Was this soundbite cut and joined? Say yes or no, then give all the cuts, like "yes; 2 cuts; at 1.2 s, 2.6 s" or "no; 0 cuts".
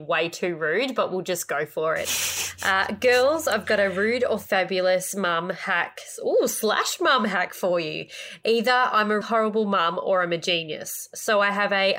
yes; 1 cut; at 9.2 s